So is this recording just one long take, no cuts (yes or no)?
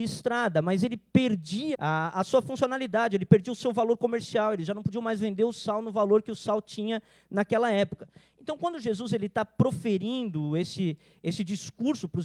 no